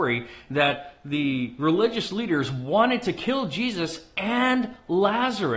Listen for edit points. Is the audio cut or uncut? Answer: uncut